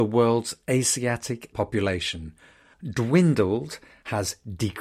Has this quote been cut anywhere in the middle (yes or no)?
yes